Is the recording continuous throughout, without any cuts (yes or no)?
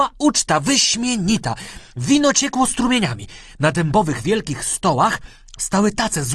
yes